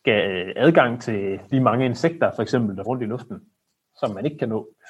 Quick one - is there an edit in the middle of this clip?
yes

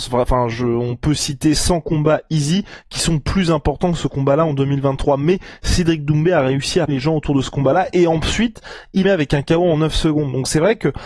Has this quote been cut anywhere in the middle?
yes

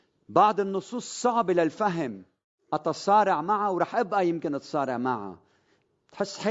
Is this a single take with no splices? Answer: yes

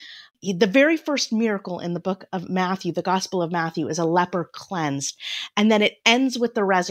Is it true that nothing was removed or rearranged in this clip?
yes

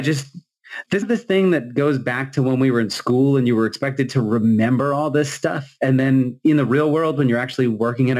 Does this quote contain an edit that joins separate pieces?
yes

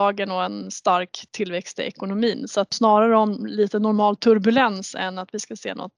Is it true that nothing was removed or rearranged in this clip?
no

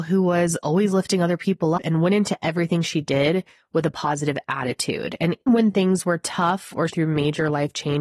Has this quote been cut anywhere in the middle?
yes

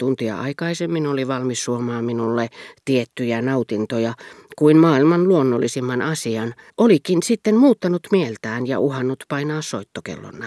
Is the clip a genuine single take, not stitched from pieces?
no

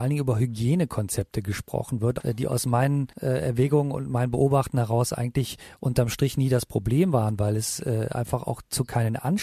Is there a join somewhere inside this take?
yes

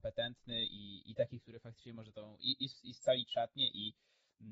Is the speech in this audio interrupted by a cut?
no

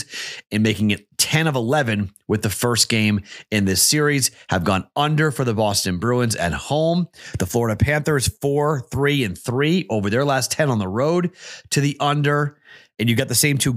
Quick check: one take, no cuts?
yes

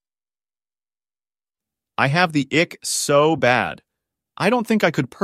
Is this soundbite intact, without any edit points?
yes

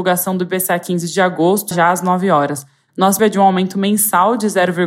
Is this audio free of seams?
no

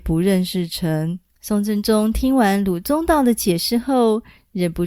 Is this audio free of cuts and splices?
no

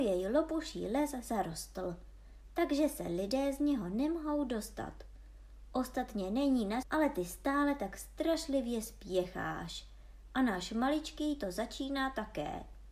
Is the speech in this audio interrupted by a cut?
yes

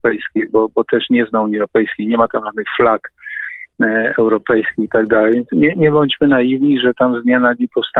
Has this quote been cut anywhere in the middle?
no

